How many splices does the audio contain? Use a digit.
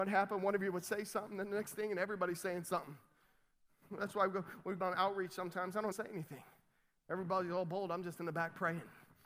2